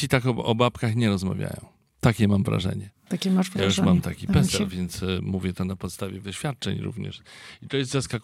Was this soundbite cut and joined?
yes; 1 cut; at 6.2 s

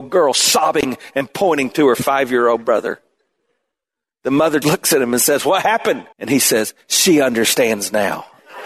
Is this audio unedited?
no; 2 cuts; at 4.6 s, 6.1 s

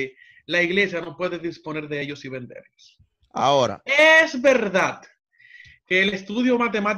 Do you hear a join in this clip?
no; 0 cuts

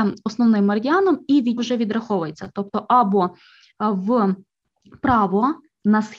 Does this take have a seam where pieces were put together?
yes; 1 cut; at 1.6 s

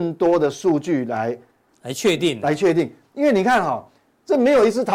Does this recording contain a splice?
no; 0 cuts

